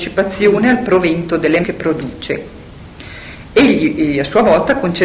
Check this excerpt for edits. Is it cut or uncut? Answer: cut